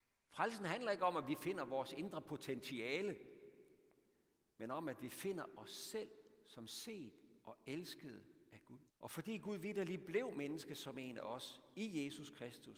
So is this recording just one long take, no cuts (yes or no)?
no